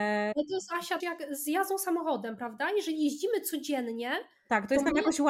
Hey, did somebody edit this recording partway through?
yes; 1 cut; at 1.0 s

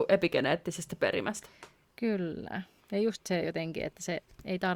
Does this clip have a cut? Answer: no; 0 cuts

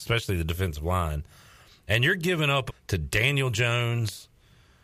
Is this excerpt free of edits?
no; 1 cut; at 2.7 s

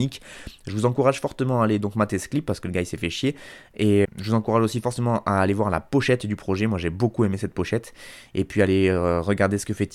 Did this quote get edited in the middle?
yes; 1 cut; at 4.0 s

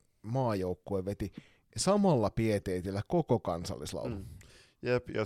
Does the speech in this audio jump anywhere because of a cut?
no; 0 cuts

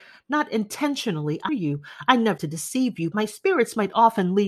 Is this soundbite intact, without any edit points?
no; 3 cuts; at 1.5 s, 2.4 s, 3.1 s

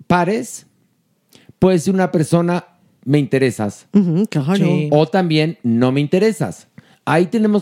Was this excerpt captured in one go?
yes; 0 cuts

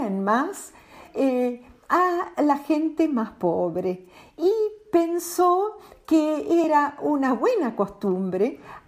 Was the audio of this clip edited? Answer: no; 0 cuts

